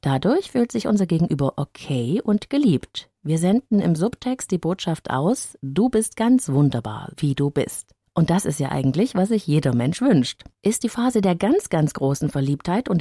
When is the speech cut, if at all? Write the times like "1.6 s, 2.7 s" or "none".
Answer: 7.1 s, 10.5 s